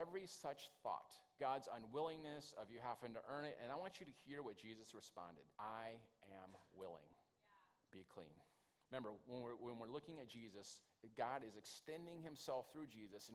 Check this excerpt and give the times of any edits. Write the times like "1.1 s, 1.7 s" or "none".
1.4 s, 5.5 s, 8.7 s

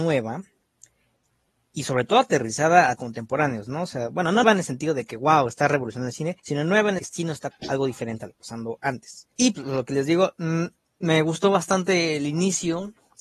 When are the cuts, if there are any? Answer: 3.0 s, 4.4 s, 6.4 s, 7.0 s, 7.5 s, 8.4 s, 9.3 s

